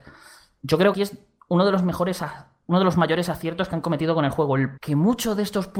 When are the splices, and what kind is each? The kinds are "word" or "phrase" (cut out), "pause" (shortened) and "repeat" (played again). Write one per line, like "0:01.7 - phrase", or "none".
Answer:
0:00.9 - word
0:04.8 - word